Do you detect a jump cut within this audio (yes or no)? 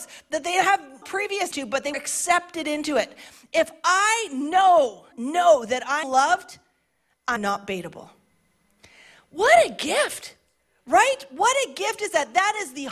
yes